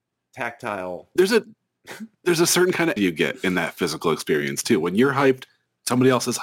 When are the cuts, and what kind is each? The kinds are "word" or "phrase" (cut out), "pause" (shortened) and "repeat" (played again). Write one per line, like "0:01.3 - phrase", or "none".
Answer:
0:02.1 - pause
0:03.0 - word